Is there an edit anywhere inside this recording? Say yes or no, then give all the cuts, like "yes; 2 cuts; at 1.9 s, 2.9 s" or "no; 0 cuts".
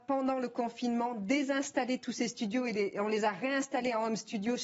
no; 0 cuts